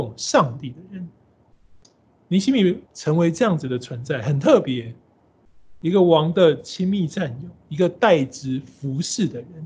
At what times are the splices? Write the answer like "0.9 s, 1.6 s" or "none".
2.9 s